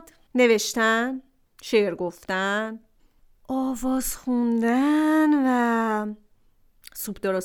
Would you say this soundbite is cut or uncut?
uncut